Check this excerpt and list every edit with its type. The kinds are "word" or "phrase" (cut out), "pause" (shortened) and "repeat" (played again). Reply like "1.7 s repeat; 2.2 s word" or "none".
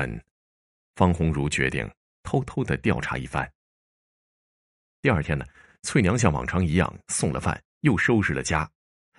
none